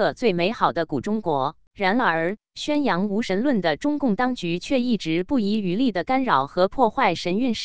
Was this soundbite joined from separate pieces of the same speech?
yes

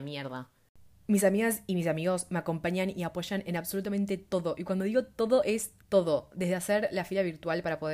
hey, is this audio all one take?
no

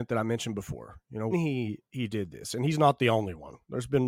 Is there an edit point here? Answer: yes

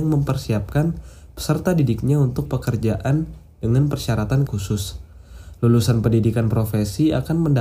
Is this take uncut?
no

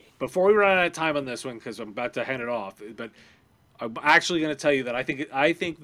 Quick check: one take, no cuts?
yes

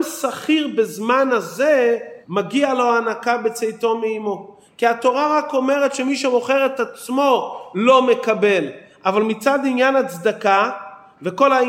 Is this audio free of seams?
no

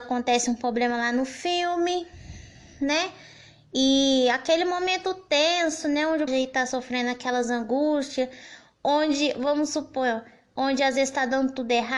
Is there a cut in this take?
yes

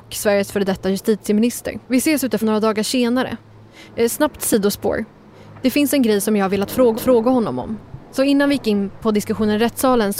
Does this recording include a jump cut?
yes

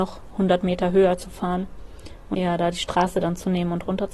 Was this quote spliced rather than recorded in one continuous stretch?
yes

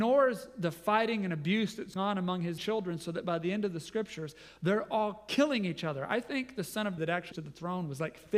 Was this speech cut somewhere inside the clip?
yes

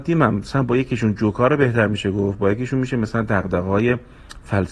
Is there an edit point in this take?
no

